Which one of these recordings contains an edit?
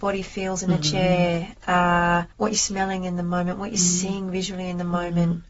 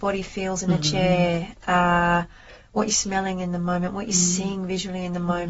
first; 1 cut; at 2.3 s

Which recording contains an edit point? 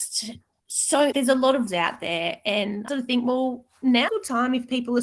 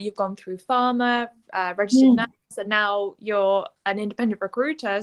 first; 4 cuts; at 1.1 s, 1.7 s, 2.9 s, 4.1 s

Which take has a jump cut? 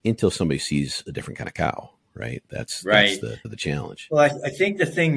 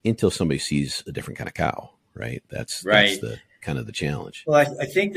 first; 1 cut; at 3.4 s

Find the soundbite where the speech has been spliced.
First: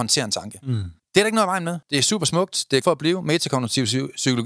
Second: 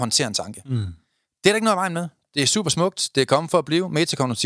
first; 3 cuts; at 1.0 s, 1.8 s, 2.8 s

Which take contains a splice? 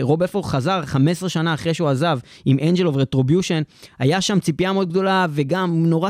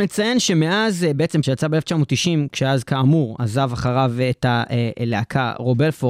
second; 1 cut; at 1.4 s

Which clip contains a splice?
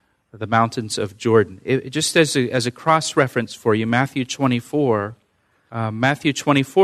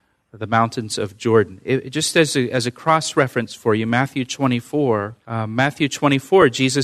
second; 1 cut; at 5.2 s

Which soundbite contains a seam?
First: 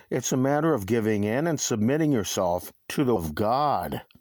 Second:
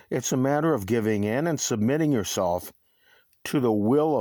first; 2 cuts; at 2.8 s, 3.2 s

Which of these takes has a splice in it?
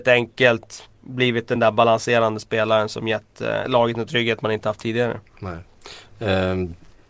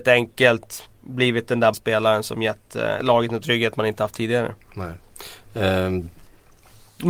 second; 1 cut; at 1.7 s

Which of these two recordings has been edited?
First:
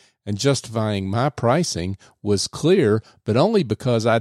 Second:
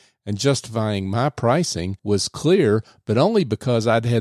second; 1 cut; at 2.0 s

